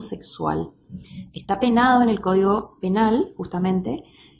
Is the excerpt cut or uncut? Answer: uncut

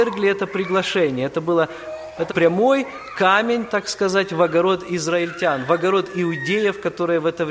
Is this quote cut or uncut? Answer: cut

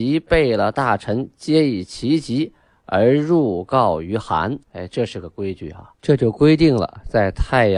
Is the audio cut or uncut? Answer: cut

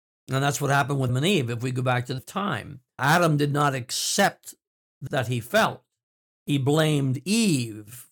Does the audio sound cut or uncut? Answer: cut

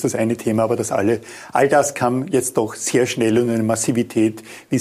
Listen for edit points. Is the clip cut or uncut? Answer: uncut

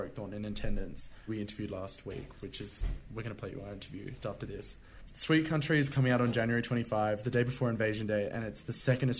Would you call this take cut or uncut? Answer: cut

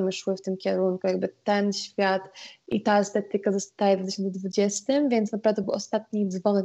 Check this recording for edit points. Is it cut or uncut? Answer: uncut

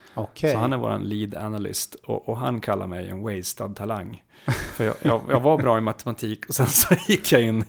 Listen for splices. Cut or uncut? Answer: uncut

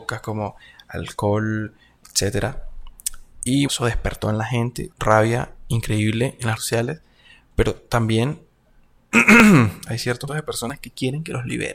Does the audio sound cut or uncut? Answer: cut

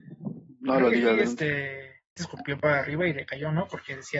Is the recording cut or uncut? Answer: cut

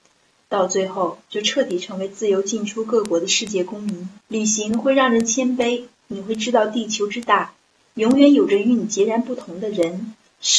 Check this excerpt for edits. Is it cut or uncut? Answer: cut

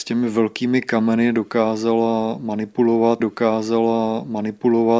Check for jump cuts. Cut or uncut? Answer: cut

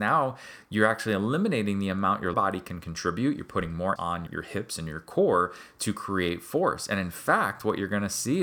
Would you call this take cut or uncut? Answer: cut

